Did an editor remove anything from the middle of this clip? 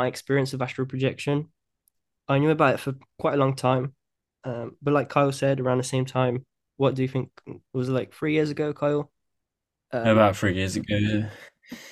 no; 0 cuts

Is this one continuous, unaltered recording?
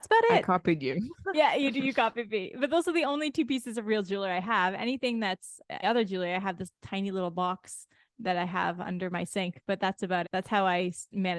no; 2 cuts; at 5.8 s, 10.2 s

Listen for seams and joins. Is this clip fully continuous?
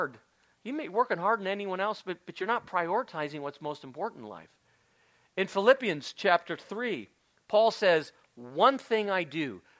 yes; 0 cuts

